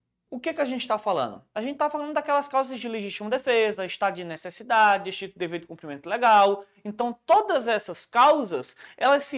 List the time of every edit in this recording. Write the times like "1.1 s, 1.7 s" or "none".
none